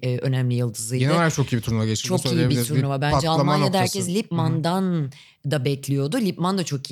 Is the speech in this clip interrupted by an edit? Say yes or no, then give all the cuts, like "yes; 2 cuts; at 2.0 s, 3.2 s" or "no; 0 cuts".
no; 0 cuts